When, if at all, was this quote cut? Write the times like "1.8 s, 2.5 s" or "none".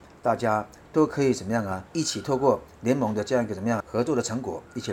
1.9 s, 3.8 s